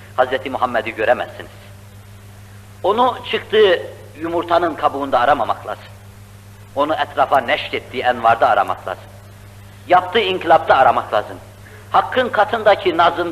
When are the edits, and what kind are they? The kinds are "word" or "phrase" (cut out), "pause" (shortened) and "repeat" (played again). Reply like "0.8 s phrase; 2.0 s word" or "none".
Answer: none